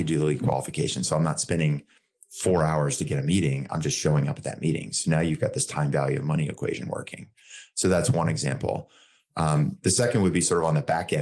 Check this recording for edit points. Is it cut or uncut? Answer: uncut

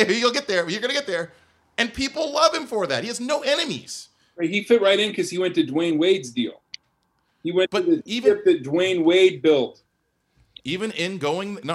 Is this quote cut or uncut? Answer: uncut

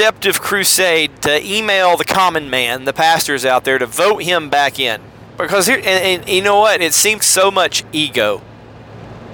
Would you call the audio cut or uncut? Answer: cut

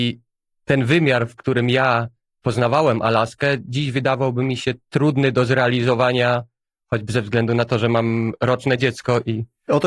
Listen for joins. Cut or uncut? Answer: uncut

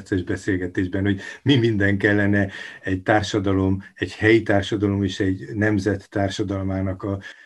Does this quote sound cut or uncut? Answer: uncut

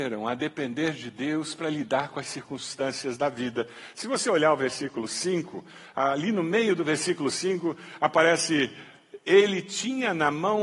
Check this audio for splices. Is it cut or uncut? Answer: uncut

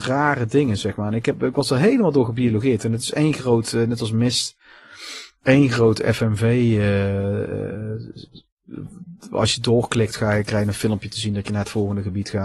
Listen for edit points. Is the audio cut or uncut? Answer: uncut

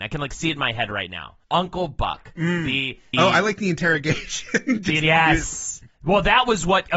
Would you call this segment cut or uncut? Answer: cut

